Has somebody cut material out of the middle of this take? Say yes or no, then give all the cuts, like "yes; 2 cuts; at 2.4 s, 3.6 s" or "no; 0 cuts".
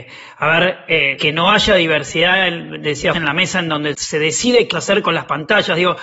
yes; 4 cuts; at 1.2 s, 3.1 s, 3.9 s, 4.7 s